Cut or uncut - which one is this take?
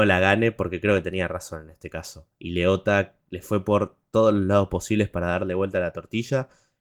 uncut